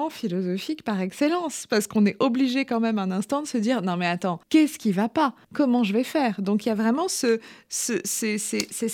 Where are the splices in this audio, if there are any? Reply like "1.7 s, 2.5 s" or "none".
4.4 s, 5.4 s